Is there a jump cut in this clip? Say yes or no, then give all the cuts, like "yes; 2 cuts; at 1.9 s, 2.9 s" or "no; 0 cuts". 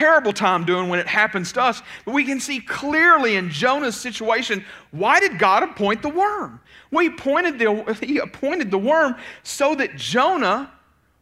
no; 0 cuts